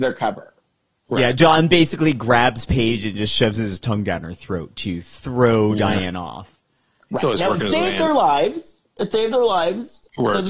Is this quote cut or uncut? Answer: uncut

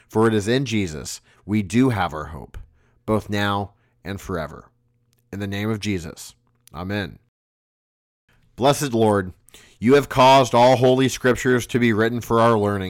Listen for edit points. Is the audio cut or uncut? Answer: uncut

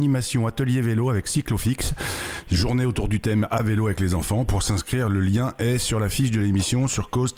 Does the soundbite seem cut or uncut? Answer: uncut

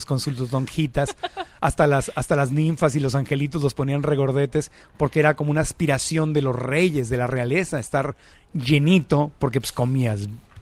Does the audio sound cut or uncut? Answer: uncut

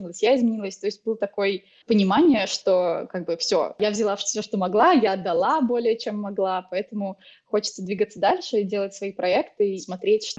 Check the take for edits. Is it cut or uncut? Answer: uncut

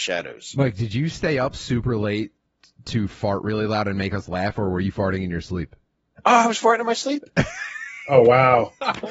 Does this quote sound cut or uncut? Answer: uncut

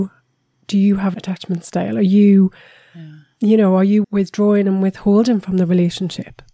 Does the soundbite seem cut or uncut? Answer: cut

